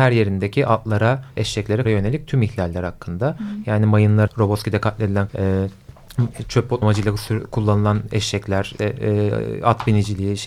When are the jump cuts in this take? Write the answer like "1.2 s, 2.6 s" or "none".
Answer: 1.4 s, 1.8 s, 4.3 s, 5.3 s, 6.8 s, 8.8 s